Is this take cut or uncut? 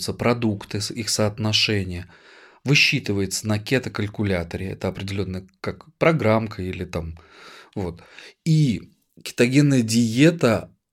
uncut